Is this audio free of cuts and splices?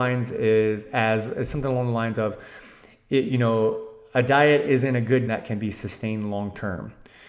no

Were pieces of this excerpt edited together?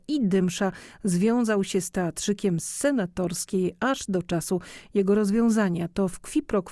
no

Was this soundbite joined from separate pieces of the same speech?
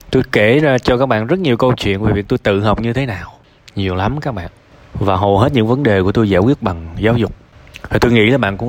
no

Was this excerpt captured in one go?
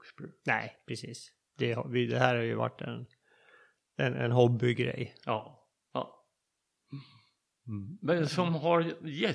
yes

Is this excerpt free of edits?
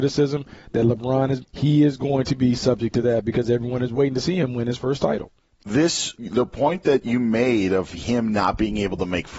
no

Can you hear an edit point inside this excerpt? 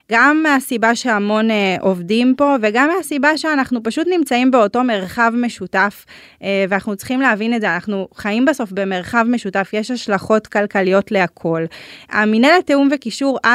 no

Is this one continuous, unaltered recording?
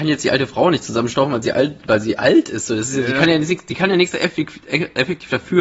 yes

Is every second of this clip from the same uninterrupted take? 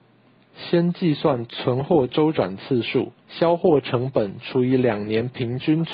no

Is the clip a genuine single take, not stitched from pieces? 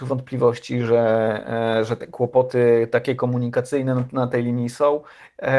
yes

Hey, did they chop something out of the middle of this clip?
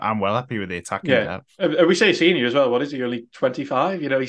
no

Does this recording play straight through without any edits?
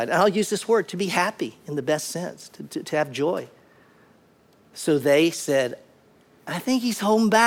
yes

